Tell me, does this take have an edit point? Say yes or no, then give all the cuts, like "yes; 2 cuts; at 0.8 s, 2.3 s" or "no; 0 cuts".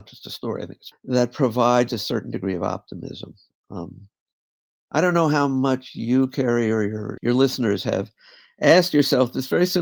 yes; 2 cuts; at 0.9 s, 7.2 s